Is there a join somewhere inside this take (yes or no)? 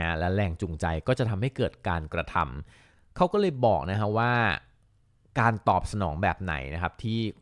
no